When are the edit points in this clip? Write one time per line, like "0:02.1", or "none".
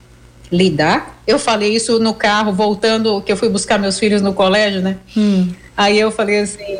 none